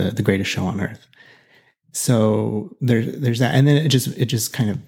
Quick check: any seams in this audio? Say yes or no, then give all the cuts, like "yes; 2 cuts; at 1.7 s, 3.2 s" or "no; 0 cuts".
no; 0 cuts